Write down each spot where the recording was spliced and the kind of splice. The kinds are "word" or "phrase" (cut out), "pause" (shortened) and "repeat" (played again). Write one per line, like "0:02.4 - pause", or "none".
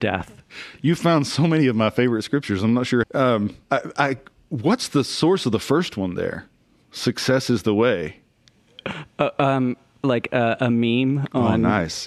0:03.0 - phrase
0:03.6 - pause